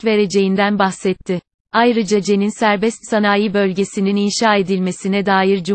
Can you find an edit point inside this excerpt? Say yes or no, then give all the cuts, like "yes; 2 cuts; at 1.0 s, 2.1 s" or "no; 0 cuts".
no; 0 cuts